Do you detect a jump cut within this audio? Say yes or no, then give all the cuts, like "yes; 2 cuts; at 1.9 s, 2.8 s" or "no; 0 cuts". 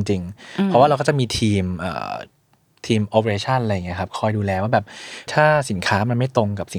yes; 2 cuts; at 2.5 s, 5.3 s